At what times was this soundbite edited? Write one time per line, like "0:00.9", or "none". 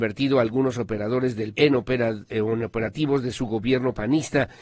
0:01.5